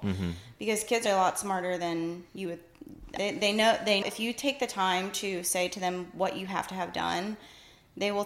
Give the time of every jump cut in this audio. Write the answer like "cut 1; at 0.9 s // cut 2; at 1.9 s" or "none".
cut 1; at 1.1 s // cut 2; at 2.3 s // cut 3; at 3.2 s // cut 4; at 4.0 s